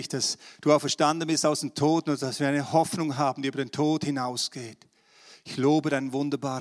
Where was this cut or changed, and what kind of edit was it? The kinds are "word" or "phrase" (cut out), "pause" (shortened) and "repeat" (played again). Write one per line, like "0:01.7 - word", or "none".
none